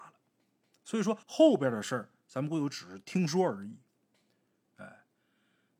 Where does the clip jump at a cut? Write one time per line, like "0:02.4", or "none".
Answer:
0:01.2